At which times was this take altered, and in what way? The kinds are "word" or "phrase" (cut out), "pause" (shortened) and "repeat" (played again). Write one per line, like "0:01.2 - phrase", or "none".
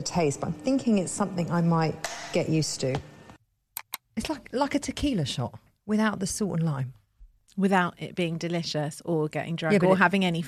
none

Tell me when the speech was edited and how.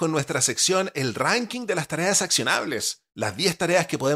0:03.1 - pause

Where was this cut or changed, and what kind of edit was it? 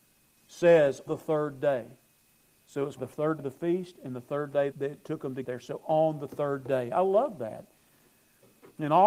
0:01.1 - word
0:03.0 - word
0:03.4 - word
0:04.7 - word
0:05.4 - word

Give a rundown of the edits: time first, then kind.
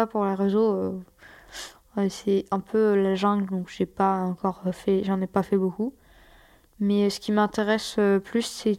none

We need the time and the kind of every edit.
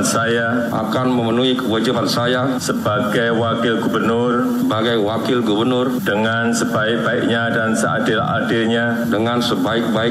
none

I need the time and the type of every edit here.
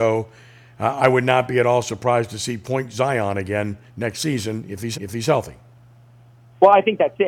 0:03.9 - pause
0:04.9 - repeat

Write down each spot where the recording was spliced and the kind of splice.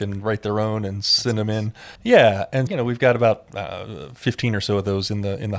0:02.0 - pause
0:02.7 - word

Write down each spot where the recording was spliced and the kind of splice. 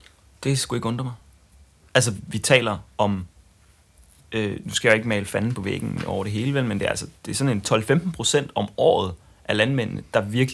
none

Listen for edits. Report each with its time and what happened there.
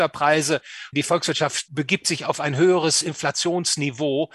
none

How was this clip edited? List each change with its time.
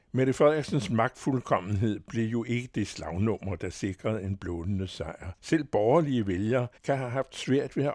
0:05.4 - pause
0:06.8 - pause

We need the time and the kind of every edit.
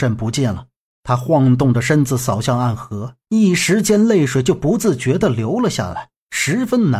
0:03.2 - pause

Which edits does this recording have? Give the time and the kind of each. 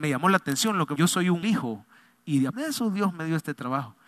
0:01.0 - word
0:01.4 - word
0:02.5 - word

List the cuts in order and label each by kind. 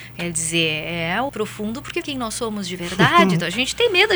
0:01.3 - phrase
0:02.0 - word

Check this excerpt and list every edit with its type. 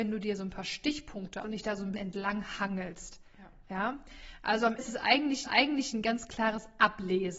0:01.4 - word
0:01.9 - word
0:04.8 - word
0:05.4 - repeat

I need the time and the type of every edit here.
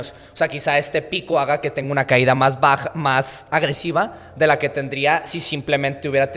none

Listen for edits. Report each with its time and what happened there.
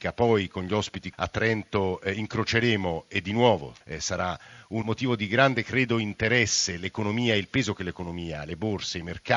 0:01.1 - word
0:03.8 - pause
0:04.8 - word

